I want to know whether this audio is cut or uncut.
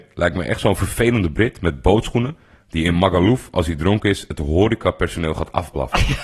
uncut